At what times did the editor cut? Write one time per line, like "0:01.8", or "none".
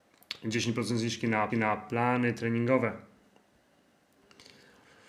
0:01.5